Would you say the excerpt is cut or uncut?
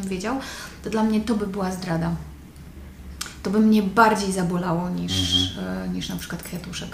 uncut